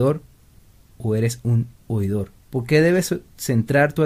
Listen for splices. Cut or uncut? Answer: cut